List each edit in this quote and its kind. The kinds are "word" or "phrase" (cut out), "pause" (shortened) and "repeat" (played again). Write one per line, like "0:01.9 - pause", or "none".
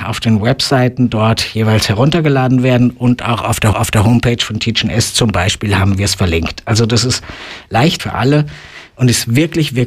0:03.7 - repeat
0:08.0 - word